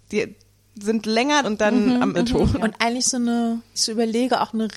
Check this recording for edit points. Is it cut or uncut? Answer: cut